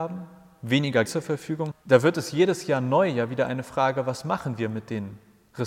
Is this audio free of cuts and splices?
no; 2 cuts; at 1.0 s, 1.7 s

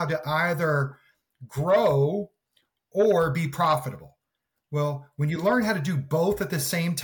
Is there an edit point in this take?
no; 0 cuts

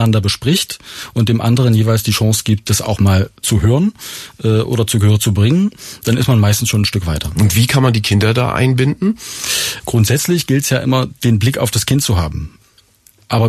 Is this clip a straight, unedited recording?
yes; 0 cuts

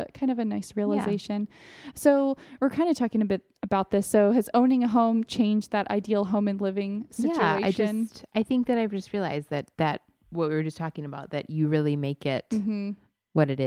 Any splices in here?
yes; 1 cut; at 9.7 s

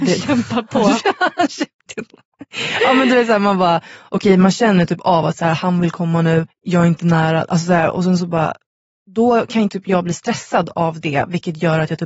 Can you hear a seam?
yes; 1 cut; at 6.5 s

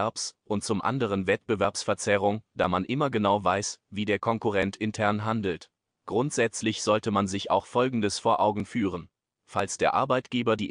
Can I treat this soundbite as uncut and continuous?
yes; 0 cuts

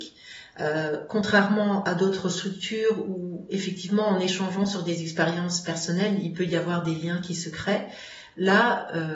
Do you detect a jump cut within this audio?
no; 0 cuts

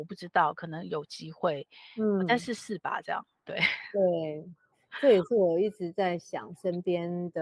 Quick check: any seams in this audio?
no; 0 cuts

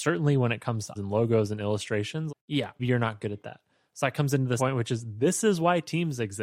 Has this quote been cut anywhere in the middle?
yes; 4 cuts; at 1.0 s, 2.3 s, 2.8 s, 4.6 s

